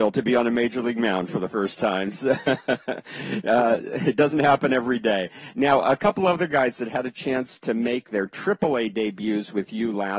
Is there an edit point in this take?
no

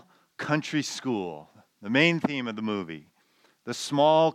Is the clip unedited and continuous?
yes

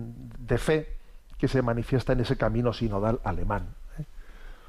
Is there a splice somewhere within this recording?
no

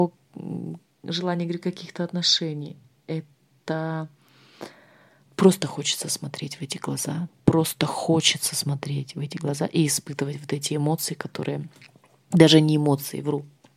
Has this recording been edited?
no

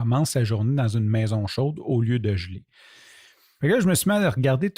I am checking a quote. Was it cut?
no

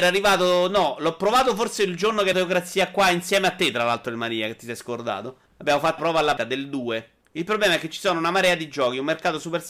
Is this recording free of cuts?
no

